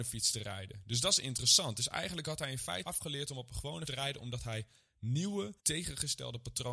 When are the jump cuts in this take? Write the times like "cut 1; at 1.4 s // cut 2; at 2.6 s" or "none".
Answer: cut 1; at 2.8 s // cut 2; at 3.9 s // cut 3; at 5.6 s